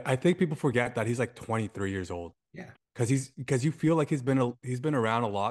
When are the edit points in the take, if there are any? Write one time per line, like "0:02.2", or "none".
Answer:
0:02.8